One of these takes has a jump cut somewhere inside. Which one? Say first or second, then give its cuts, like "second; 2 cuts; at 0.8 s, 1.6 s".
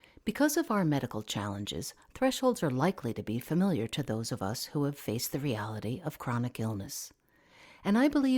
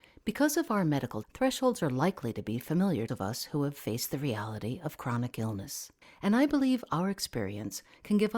second; 3 cuts; at 1.2 s, 3.1 s, 6.0 s